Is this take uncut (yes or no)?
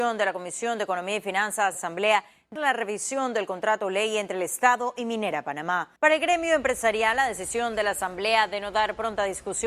no